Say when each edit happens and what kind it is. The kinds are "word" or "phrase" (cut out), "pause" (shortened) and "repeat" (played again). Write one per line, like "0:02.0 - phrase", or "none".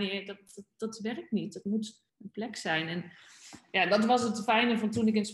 0:02.1 - pause